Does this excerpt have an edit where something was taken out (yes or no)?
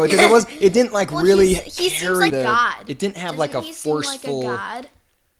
yes